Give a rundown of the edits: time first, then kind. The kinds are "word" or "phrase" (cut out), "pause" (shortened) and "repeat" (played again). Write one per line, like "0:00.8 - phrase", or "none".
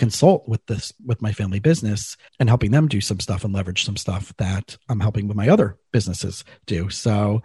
none